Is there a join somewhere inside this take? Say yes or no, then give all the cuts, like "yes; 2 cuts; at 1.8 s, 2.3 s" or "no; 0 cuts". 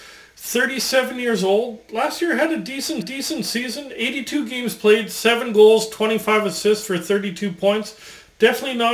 yes; 1 cut; at 3.0 s